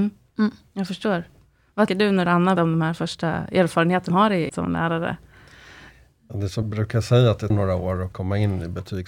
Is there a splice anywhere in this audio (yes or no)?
yes